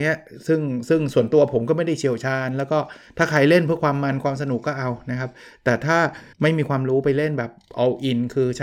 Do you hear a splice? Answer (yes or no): yes